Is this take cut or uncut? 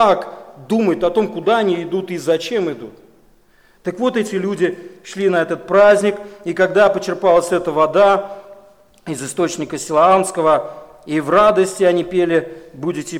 uncut